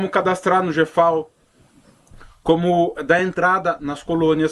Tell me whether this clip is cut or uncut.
uncut